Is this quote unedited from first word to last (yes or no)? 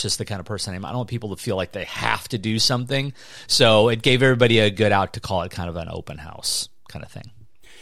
yes